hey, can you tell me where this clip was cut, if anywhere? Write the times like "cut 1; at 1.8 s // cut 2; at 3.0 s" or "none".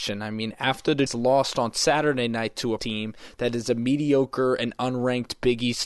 cut 1; at 1.1 s // cut 2; at 2.8 s